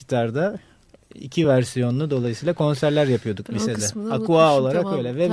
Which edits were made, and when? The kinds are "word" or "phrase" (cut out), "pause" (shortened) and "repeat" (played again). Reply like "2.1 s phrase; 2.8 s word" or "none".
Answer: none